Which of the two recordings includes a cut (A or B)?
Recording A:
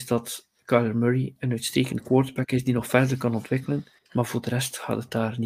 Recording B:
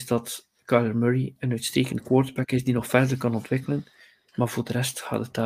A